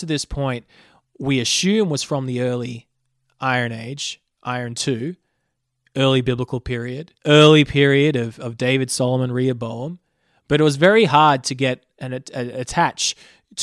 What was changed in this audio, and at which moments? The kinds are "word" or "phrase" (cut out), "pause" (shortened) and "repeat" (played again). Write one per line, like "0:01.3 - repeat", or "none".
0:07.2 - pause